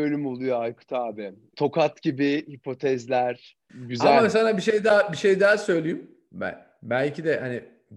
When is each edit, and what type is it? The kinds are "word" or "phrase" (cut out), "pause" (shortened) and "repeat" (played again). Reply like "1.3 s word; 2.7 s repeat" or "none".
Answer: none